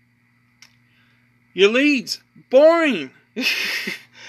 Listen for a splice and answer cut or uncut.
uncut